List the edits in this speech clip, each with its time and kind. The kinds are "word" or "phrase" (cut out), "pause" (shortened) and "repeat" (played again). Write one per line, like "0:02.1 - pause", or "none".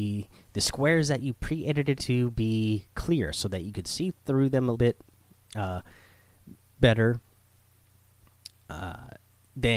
0:02.0 - phrase
0:04.7 - word